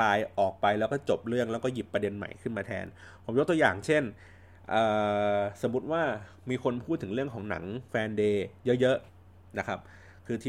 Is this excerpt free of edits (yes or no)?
no